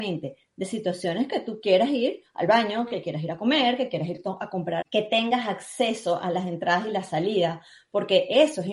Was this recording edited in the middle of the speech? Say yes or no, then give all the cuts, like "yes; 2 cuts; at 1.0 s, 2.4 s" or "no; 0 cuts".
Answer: yes; 1 cut; at 4.8 s